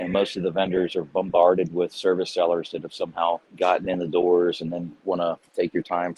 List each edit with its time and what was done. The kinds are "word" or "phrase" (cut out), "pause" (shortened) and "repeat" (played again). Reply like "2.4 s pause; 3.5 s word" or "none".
3.5 s pause

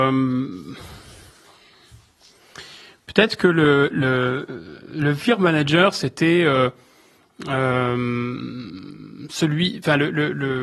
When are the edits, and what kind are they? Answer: none

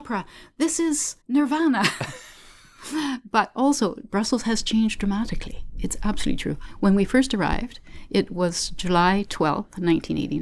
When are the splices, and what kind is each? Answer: 1.2 s pause

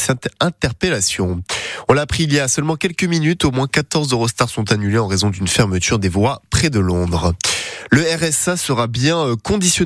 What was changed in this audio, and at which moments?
none

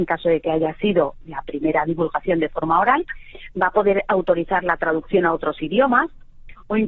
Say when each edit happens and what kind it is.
none

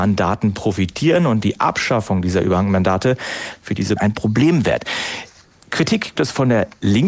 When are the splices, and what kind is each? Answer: 1.4 s word; 4.0 s word; 6.1 s word

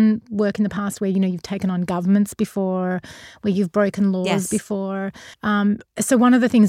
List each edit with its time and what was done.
5.3 s pause

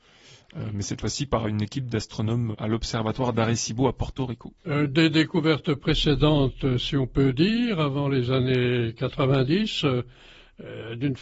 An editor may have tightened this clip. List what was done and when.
2.5 s word; 4.6 s pause

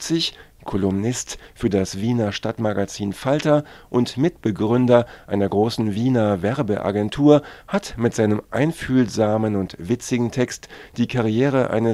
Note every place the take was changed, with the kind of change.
none

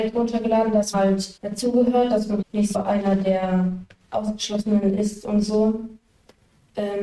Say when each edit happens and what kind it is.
0.9 s word; 1.4 s word; 2.4 s word; 2.7 s word

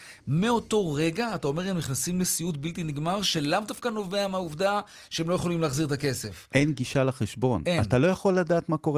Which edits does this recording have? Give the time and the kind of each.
none

